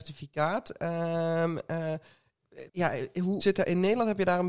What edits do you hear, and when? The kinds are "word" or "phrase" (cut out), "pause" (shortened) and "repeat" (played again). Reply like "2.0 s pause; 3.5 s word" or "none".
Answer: 2.7 s pause; 3.4 s word